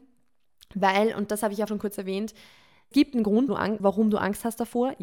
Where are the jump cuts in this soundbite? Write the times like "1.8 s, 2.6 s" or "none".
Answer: 1.7 s, 2.9 s, 3.5 s, 3.8 s